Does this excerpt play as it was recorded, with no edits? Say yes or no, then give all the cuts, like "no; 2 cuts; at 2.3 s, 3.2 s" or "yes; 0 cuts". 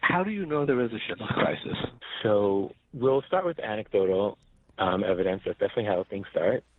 yes; 0 cuts